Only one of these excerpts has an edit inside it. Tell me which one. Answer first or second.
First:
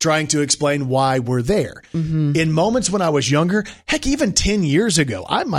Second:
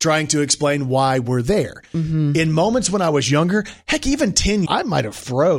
second